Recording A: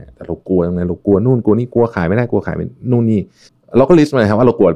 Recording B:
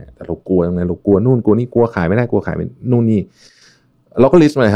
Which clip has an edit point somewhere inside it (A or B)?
A